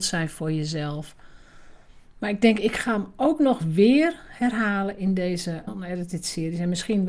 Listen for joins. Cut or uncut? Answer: cut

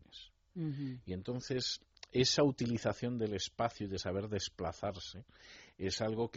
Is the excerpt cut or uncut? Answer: uncut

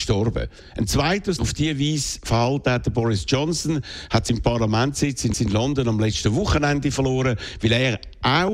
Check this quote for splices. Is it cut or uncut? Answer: cut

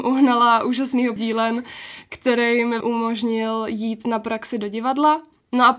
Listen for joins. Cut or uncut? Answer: cut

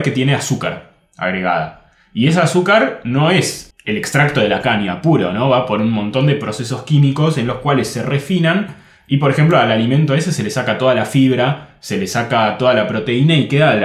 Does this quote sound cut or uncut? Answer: uncut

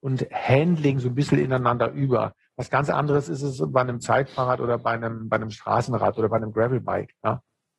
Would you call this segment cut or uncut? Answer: uncut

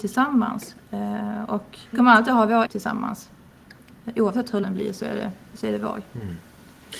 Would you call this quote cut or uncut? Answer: cut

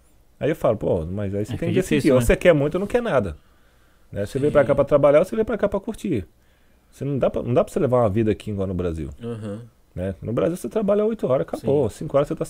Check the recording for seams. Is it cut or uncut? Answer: uncut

